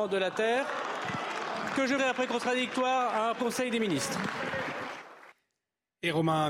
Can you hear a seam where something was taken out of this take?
yes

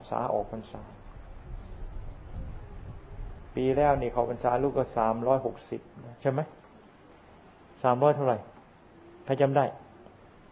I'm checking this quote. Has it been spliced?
yes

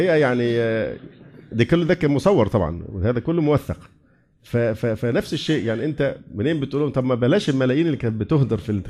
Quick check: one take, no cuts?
yes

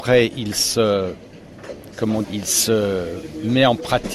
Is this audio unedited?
no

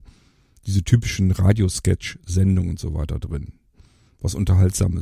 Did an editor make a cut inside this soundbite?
no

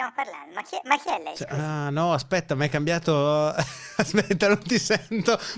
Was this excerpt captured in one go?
yes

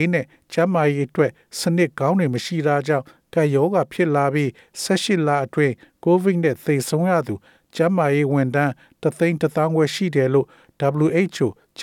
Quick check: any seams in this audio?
no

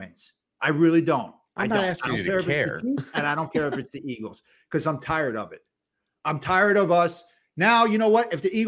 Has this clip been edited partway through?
no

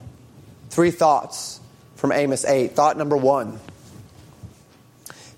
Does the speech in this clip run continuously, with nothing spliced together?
yes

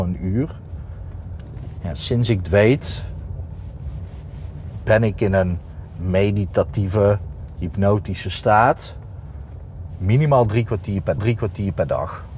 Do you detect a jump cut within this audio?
yes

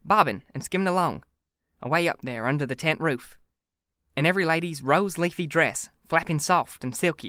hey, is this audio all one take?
yes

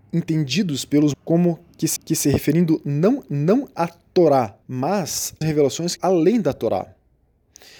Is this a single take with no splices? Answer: no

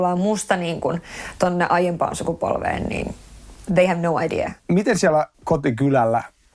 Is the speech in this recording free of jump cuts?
no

